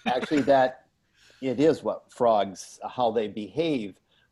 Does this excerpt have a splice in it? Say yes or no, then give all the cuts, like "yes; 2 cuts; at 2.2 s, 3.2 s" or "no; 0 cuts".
no; 0 cuts